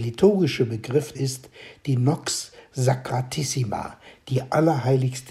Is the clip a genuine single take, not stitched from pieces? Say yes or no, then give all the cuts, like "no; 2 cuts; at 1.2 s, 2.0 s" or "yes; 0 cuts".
no; 1 cut; at 1.1 s